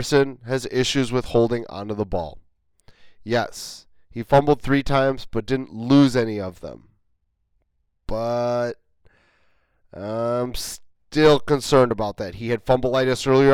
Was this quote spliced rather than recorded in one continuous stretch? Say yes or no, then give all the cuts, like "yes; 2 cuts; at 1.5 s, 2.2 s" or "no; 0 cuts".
no; 0 cuts